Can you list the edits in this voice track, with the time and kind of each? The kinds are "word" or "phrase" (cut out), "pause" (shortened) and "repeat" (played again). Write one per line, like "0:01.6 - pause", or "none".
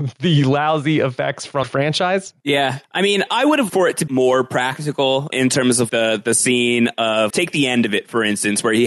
0:01.6 - phrase
0:02.8 - pause
0:03.3 - word
0:03.7 - word
0:04.1 - phrase
0:05.3 - word
0:05.9 - word
0:07.3 - word